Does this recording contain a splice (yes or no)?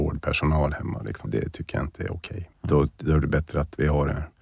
yes